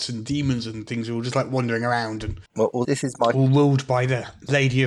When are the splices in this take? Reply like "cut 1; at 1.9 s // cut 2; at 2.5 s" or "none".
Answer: cut 1; at 2.5 s // cut 2; at 2.8 s